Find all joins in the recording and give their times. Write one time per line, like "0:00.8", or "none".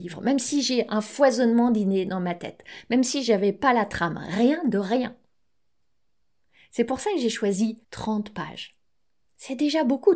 0:07.8

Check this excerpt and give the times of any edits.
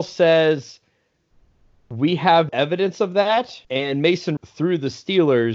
0:02.5
0:03.6
0:04.4

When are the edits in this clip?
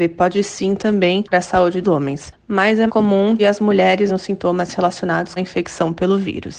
0:01.3
0:01.8
0:02.9
0:03.4
0:04.1
0:05.4

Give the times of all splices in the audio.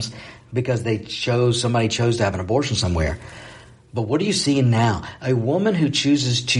none

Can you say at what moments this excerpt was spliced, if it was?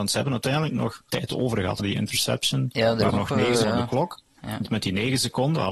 0:01.1
0:01.8
0:03.1
0:03.6

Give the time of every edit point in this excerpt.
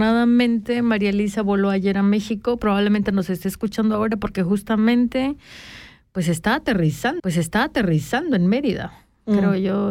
0:07.2

